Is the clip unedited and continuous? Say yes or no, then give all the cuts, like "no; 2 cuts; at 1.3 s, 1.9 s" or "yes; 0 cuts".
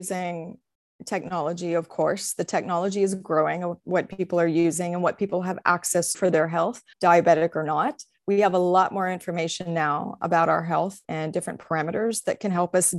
no; 4 cuts; at 6.1 s, 6.9 s, 10.2 s, 11.0 s